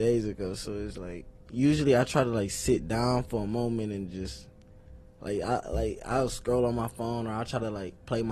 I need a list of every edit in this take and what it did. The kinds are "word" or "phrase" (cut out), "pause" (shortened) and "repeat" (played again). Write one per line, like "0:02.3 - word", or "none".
none